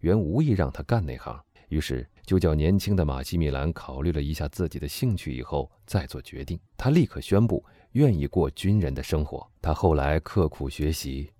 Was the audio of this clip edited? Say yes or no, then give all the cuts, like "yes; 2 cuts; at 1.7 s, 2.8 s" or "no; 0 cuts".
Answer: yes; 4 cuts; at 1.6 s, 2.2 s, 6.7 s, 9.6 s